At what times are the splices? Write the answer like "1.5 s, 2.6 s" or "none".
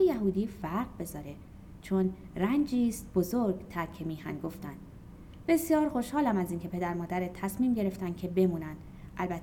none